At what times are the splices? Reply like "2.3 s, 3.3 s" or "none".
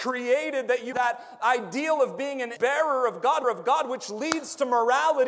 0.9 s, 2.6 s, 3.4 s

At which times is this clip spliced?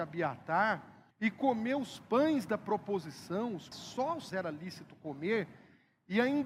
1.1 s, 3.7 s, 4.3 s

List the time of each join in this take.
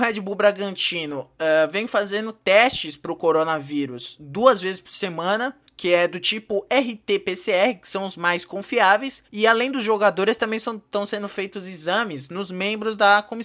5.7 s, 9.3 s

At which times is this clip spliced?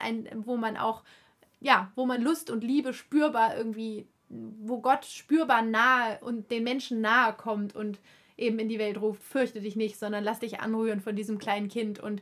none

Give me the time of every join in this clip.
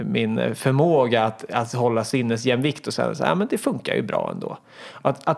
none

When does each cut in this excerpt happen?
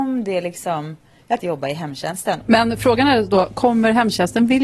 1.4 s

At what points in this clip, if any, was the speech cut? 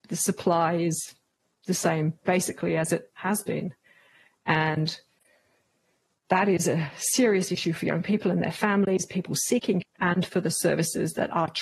3.1 s, 9.8 s

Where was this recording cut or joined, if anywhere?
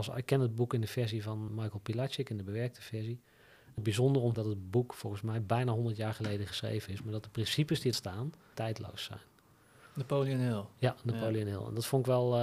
1.5 s, 3.8 s, 4.3 s, 7.9 s, 8.5 s

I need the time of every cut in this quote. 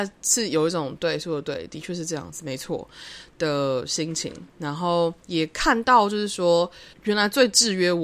5.2 s, 6.9 s

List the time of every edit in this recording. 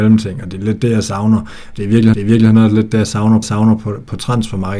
2.1 s, 3.4 s

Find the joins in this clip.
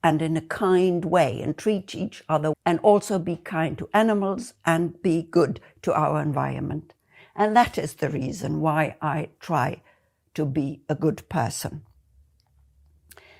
2.5 s

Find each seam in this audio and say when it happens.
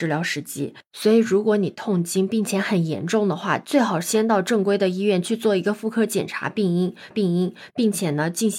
7.1 s

